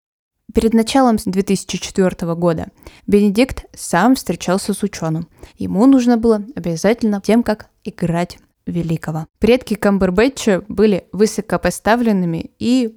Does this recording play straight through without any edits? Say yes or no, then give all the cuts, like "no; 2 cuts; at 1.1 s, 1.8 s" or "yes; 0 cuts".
no; 5 cuts; at 1.2 s, 3.0 s, 5.5 s, 7.2 s, 9.3 s